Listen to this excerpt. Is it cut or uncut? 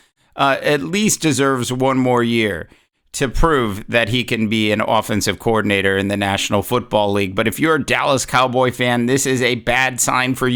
uncut